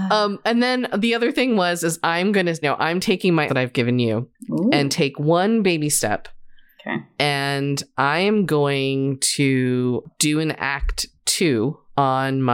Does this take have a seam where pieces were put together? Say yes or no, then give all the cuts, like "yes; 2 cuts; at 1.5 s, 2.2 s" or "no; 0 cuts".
yes; 2 cuts; at 2.6 s, 3.5 s